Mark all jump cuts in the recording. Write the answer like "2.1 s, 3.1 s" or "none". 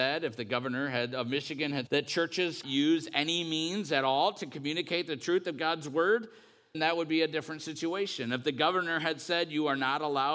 1.9 s, 2.6 s, 6.7 s

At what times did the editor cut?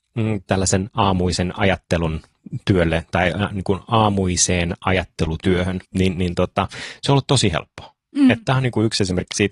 5.8 s

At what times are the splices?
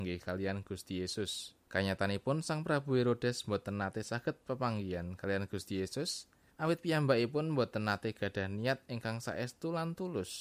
1.6 s, 6.5 s

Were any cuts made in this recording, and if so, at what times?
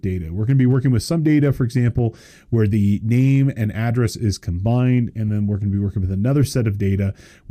none

